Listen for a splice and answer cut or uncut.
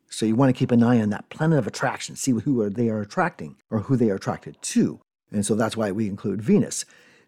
cut